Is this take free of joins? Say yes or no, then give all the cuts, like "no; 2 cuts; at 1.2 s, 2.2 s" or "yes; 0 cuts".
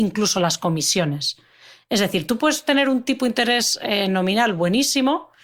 yes; 0 cuts